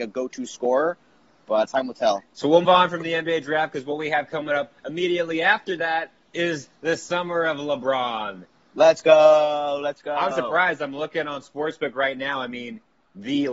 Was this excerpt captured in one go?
no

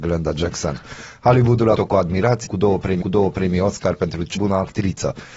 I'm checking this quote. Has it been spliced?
yes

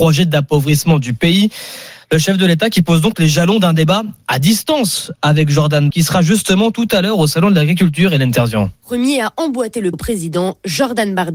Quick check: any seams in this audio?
yes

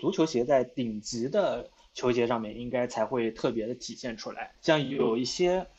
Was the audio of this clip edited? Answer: yes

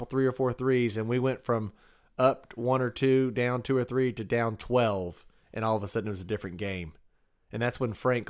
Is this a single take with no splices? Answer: yes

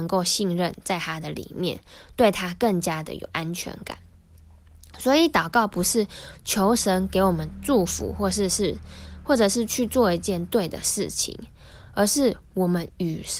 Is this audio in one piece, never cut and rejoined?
yes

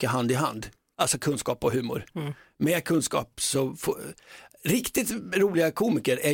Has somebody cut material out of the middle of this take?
no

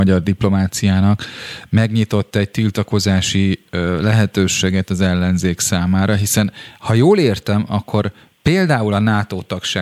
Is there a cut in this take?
no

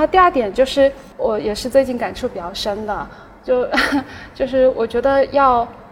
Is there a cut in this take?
yes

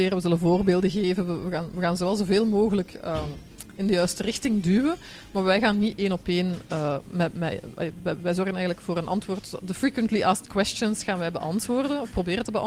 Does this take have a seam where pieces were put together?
no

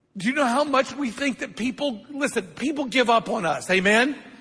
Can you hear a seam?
no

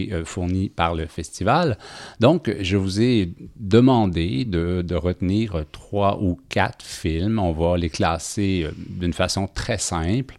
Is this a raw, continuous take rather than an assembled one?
yes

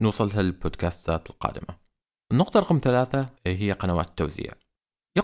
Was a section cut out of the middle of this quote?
yes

